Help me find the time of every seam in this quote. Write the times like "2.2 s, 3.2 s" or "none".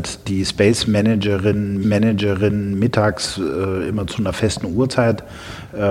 1.8 s